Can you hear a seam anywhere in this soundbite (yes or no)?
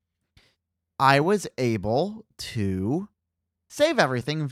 no